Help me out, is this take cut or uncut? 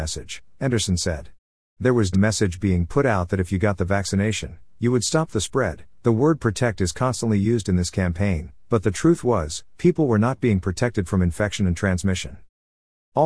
cut